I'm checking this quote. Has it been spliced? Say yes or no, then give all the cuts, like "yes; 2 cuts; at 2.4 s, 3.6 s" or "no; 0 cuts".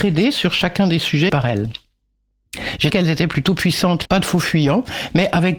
yes; 3 cuts; at 1.3 s, 2.9 s, 4.1 s